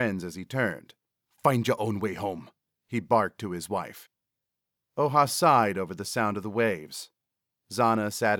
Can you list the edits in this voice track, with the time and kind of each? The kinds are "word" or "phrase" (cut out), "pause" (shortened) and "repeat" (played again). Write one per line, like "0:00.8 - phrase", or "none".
none